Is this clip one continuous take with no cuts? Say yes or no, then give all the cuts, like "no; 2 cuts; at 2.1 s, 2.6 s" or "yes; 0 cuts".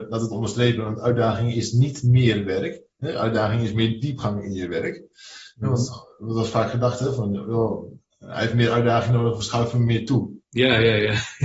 no; 2 cuts; at 2.9 s, 10.4 s